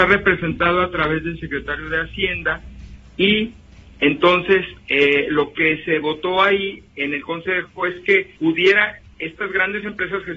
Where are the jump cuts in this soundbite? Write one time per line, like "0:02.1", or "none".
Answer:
0:08.4